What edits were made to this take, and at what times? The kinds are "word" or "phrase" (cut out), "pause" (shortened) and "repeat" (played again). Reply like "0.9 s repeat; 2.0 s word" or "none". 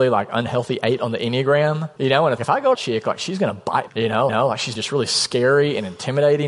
2.0 s pause; 2.4 s word; 2.7 s phrase; 3.9 s phrase; 4.3 s repeat; 4.7 s word